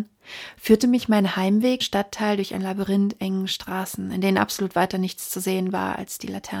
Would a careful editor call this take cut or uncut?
cut